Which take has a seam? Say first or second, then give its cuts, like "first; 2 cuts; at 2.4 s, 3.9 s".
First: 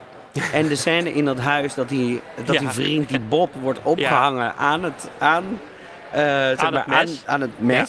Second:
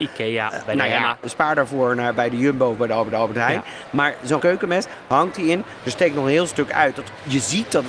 second; 3 cuts; at 1.2 s, 3.1 s, 4.4 s